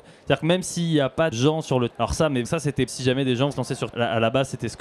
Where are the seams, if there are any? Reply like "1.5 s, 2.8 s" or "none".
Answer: 1.3 s, 1.9 s, 2.4 s, 2.9 s, 3.5 s, 3.9 s